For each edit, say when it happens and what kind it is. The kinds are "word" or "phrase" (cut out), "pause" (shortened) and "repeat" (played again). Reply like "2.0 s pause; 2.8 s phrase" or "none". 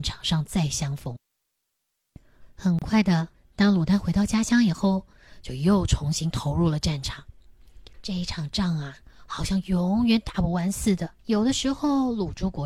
3.3 s pause; 7.9 s pause; 11.2 s pause